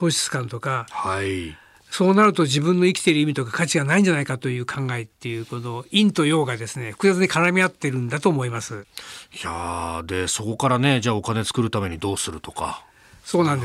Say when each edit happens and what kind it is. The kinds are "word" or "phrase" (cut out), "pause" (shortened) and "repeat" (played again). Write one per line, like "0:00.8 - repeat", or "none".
none